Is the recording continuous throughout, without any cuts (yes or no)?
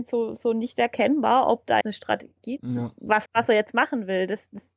no